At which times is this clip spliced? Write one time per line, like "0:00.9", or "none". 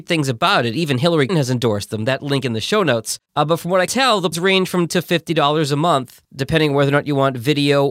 0:01.3
0:03.3
0:03.9
0:04.3
0:04.9